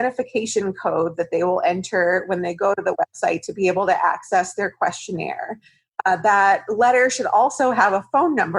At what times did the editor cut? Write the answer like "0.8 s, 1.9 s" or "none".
none